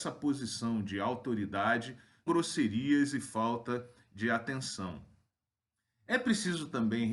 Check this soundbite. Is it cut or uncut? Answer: cut